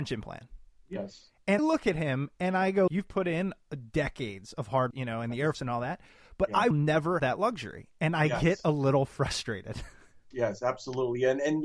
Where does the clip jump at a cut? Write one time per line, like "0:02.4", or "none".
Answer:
0:01.6
0:02.9
0:04.9
0:05.5
0:06.7
0:07.2
0:10.3